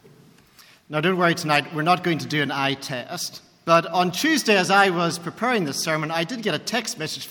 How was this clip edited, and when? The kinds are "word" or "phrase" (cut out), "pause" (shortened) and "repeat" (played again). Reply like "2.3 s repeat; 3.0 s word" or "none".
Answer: none